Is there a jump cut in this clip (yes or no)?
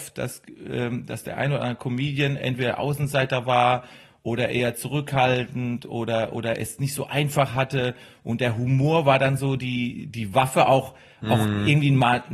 no